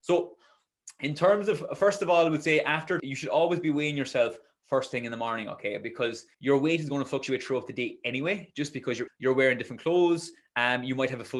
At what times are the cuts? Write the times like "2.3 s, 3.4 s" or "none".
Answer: 3.0 s, 6.3 s, 9.1 s